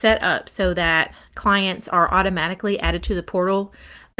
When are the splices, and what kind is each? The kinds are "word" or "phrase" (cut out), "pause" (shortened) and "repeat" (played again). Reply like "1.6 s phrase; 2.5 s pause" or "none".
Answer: none